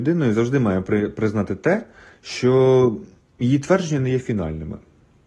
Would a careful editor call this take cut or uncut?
uncut